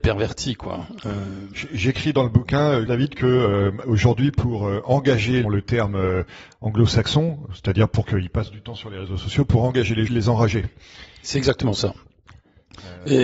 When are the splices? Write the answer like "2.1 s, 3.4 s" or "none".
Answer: 2.9 s, 5.4 s, 10.1 s